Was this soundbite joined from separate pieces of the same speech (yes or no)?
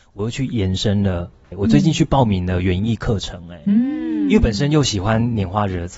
no